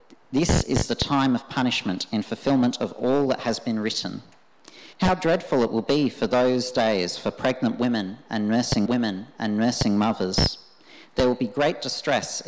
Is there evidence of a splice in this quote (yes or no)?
yes